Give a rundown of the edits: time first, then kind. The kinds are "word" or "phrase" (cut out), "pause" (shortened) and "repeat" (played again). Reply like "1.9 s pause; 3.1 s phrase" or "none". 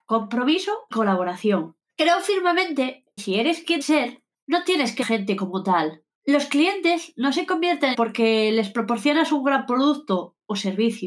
0.9 s word; 1.9 s pause; 3.2 s word; 3.8 s word; 4.3 s pause; 5.0 s phrase; 6.1 s pause; 7.9 s phrase